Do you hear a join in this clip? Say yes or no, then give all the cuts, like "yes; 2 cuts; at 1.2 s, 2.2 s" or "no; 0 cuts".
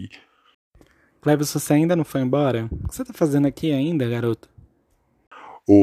no; 0 cuts